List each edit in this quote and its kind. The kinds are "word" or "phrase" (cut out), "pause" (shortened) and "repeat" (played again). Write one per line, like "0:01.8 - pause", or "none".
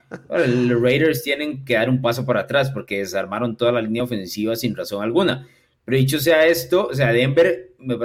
none

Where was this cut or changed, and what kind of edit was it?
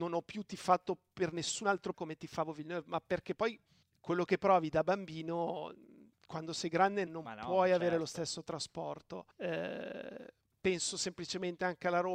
0:01.9 - word
0:03.8 - pause
0:06.1 - pause
0:07.1 - word
0:09.3 - pause

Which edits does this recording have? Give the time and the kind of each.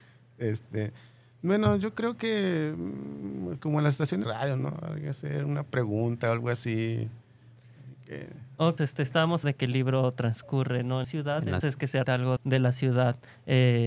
0:03.6 - word
0:04.2 - word
0:08.8 - word
0:09.4 - word
0:11.0 - word
0:11.6 - word
0:12.0 - word
0:12.4 - word

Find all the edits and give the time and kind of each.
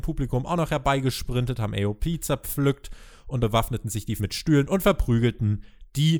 0:03.4 - word
0:04.2 - word

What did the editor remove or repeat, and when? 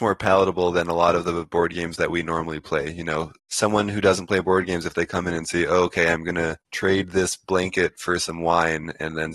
0:03.4 - pause
0:06.6 - pause

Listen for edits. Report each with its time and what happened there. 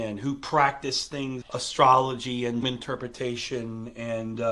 0:01.4 - word
0:02.6 - word

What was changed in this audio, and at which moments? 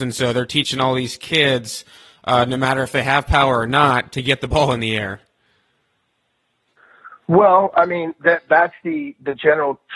none

